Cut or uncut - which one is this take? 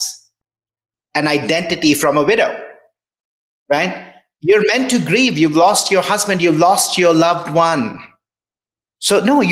uncut